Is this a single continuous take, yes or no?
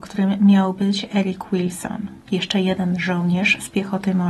no